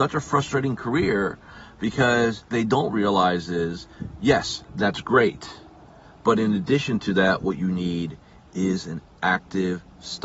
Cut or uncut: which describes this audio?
cut